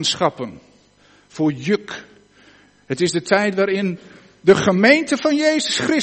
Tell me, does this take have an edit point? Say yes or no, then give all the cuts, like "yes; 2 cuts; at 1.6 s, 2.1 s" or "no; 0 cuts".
no; 0 cuts